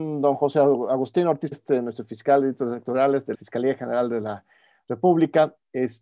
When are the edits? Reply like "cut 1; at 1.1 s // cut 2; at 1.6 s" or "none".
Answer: cut 1; at 1.5 s // cut 2; at 3.3 s